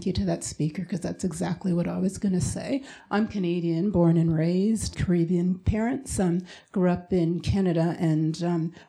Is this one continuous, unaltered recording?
no; 1 cut; at 4.9 s

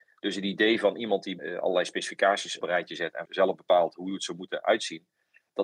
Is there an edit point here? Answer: yes; 3 cuts; at 1.4 s, 2.6 s, 3.3 s

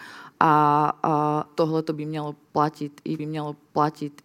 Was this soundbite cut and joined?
yes; 2 cuts; at 1.5 s, 3.2 s

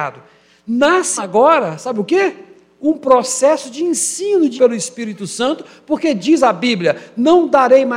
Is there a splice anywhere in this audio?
yes; 2 cuts; at 1.2 s, 4.6 s

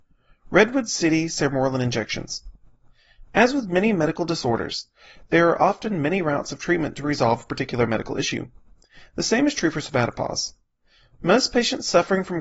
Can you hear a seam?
no; 0 cuts

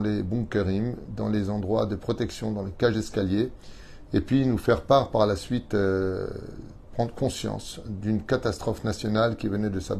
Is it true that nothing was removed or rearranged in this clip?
yes; 0 cuts

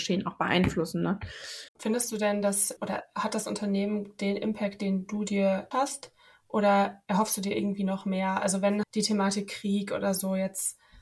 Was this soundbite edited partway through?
yes; 3 cuts; at 1.7 s, 5.7 s, 8.8 s

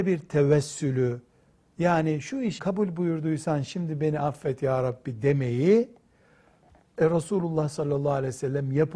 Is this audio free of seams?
no; 1 cut; at 2.6 s

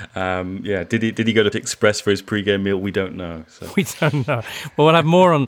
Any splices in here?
yes; 1 cut; at 1.5 s

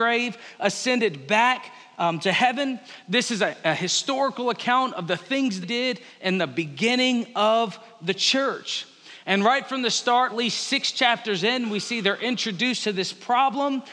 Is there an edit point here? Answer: yes; 2 cuts; at 5.6 s, 10.3 s

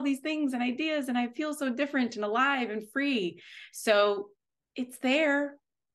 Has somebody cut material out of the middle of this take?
no; 0 cuts

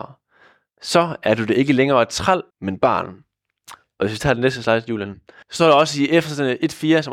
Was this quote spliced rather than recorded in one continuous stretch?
yes; 2 cuts; at 2.5 s, 5.4 s

